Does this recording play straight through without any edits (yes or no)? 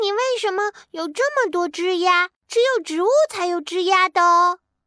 no